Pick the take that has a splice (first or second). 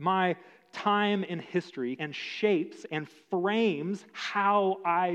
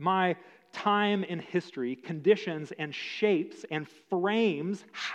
first